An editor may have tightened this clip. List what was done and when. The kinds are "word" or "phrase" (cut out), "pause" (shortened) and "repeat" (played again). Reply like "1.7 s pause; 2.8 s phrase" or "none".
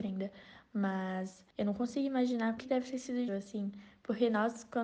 1.5 s pause; 2.6 s word; 3.3 s word